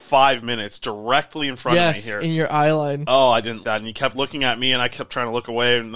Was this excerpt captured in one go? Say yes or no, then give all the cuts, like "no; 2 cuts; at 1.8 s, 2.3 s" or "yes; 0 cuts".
no; 1 cut; at 3.6 s